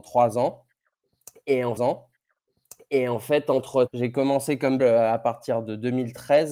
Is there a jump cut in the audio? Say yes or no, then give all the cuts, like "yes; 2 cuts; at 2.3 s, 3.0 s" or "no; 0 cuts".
yes; 3 cuts; at 1.8 s, 3.9 s, 4.8 s